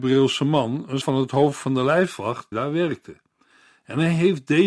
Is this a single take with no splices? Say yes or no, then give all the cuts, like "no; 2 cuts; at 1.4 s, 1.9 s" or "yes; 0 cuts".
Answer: no; 2 cuts; at 1.0 s, 2.5 s